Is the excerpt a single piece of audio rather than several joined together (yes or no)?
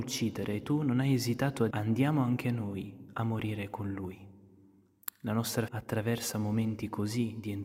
no